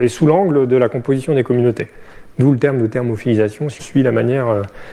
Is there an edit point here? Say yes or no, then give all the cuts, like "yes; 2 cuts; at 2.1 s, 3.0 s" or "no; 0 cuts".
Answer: yes; 1 cut; at 3.8 s